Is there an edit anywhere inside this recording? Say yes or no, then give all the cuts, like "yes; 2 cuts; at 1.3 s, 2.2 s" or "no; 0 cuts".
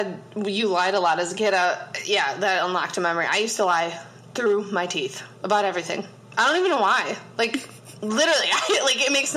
no; 0 cuts